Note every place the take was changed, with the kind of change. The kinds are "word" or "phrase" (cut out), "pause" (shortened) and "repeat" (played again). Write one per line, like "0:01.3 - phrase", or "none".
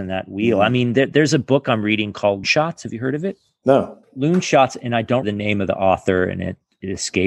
0:02.4 - word
0:04.0 - pause
0:05.2 - word